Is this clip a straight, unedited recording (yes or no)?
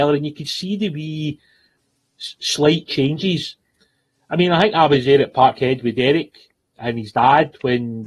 yes